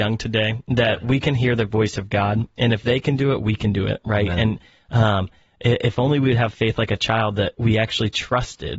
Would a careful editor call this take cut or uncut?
uncut